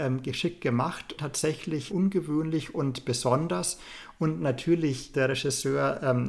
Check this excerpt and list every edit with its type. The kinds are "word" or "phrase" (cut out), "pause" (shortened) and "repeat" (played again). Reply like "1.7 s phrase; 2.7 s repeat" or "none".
1.2 s word; 1.9 s word; 5.1 s word